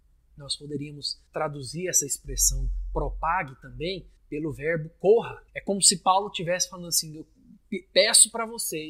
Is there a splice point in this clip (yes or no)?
yes